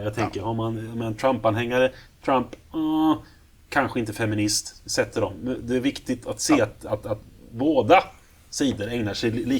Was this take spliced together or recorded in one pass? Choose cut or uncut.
uncut